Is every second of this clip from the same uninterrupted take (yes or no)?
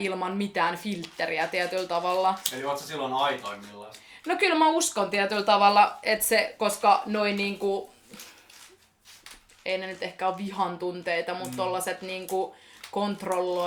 yes